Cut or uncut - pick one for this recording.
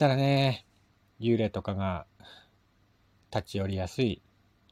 uncut